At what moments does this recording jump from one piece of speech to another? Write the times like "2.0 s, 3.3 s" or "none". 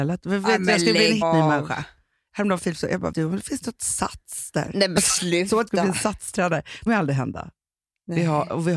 1.2 s, 2.6 s, 3.1 s, 5.7 s, 6.9 s

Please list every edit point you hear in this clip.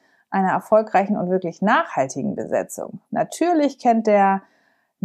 3.1 s

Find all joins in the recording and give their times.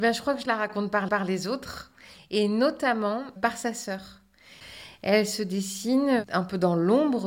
1.1 s, 3.4 s

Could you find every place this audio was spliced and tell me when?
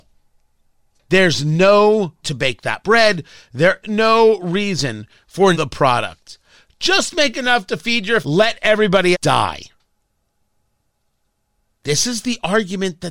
2.2 s, 2.8 s, 3.8 s, 5.5 s, 8.2 s, 9.1 s

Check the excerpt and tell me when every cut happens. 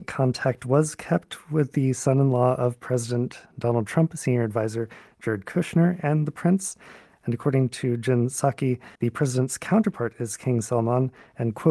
9.0 s

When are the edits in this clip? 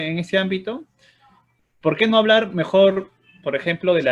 none

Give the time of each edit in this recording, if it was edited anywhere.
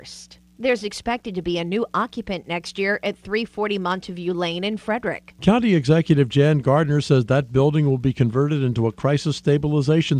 none

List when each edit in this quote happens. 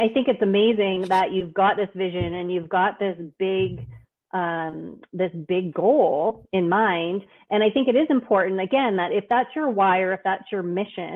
none

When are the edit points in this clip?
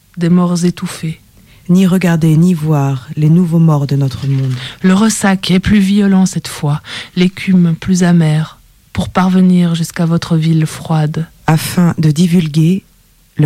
none

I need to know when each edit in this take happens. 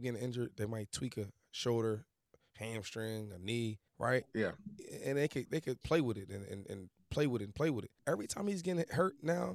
3.9 s, 8.0 s

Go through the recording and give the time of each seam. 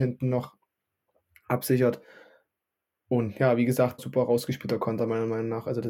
4.0 s

